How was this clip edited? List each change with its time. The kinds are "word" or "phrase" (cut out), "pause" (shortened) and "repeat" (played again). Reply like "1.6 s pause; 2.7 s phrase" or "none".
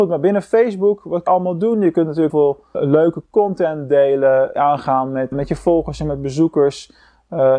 1.3 s word; 2.3 s word; 2.7 s word; 4.6 s word; 5.3 s word